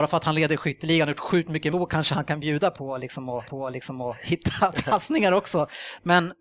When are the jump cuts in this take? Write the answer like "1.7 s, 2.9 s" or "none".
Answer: 1.7 s, 3.5 s